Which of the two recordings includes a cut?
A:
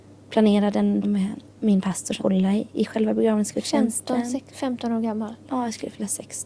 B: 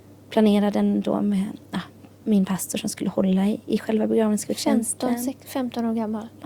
A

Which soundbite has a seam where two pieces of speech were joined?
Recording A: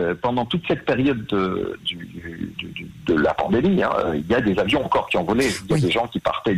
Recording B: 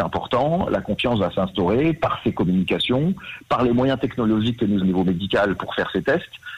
B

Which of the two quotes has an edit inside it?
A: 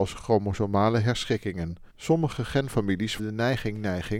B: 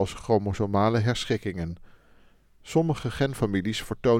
A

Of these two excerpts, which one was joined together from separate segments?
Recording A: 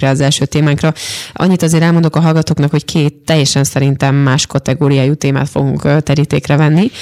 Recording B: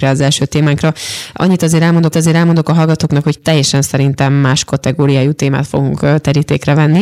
B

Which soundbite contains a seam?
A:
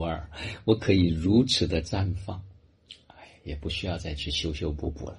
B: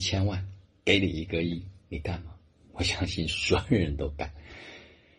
B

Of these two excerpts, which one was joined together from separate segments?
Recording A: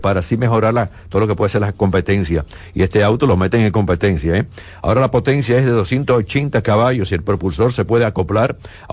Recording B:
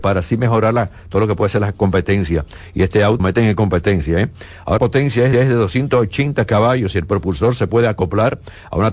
B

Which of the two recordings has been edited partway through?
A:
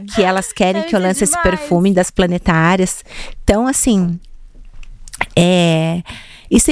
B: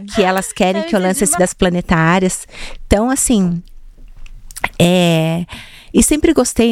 B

